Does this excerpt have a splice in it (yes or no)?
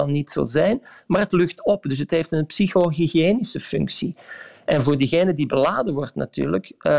no